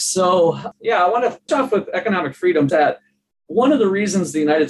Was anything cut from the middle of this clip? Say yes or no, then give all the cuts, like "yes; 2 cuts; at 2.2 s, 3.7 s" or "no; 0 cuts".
yes; 2 cuts; at 1.5 s, 2.7 s